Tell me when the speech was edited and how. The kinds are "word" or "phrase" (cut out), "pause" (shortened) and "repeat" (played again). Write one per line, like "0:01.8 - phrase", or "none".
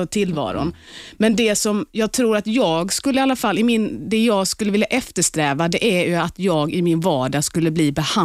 none